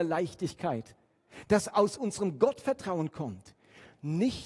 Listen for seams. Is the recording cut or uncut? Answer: uncut